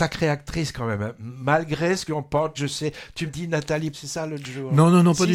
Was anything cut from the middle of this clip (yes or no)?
yes